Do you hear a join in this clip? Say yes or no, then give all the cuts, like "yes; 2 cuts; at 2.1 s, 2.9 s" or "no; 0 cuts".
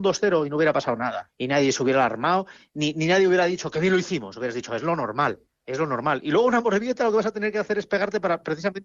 yes; 2 cuts; at 1.3 s, 5.5 s